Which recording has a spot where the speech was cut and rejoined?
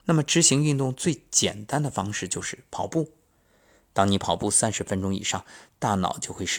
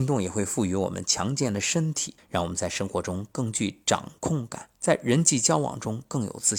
second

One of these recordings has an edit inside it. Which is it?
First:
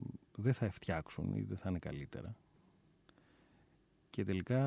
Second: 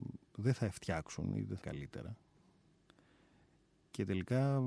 second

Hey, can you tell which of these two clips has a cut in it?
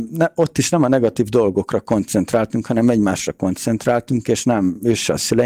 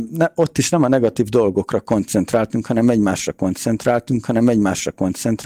second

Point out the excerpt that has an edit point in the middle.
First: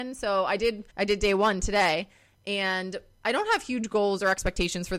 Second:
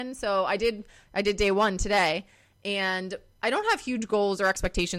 first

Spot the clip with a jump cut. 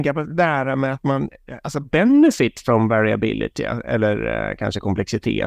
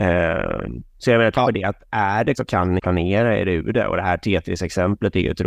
second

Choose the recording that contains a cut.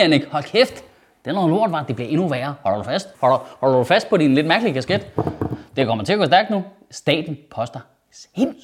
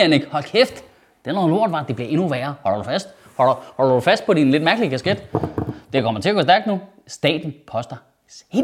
first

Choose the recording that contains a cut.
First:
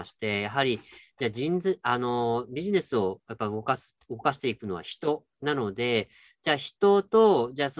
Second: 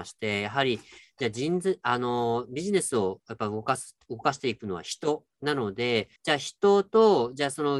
second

